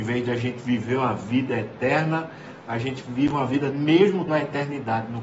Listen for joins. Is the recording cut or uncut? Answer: cut